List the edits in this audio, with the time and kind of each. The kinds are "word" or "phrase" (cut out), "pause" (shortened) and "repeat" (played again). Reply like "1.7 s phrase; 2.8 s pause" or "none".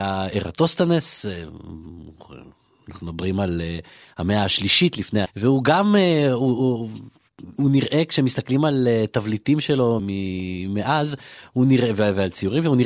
5.3 s word; 10.0 s word